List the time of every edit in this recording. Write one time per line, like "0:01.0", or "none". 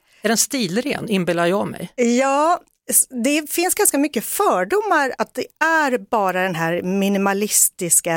0:05.2